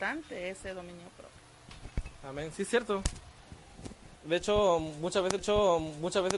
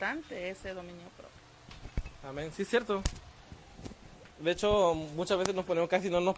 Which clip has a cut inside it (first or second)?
first